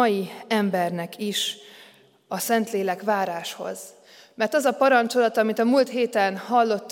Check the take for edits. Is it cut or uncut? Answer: uncut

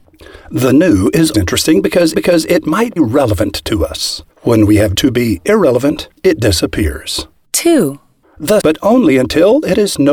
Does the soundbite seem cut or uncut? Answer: cut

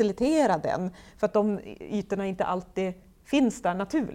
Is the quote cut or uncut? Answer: uncut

